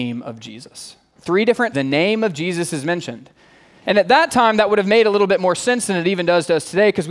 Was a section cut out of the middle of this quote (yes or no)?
yes